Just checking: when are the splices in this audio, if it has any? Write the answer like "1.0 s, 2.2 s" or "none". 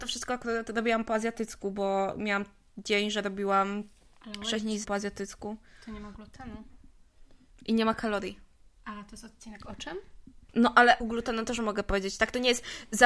4.8 s, 11.0 s